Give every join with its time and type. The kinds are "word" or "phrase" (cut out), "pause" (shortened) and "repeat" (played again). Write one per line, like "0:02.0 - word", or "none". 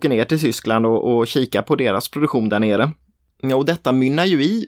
none